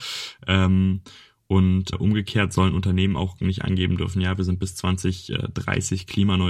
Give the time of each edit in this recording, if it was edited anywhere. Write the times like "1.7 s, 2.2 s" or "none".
1.9 s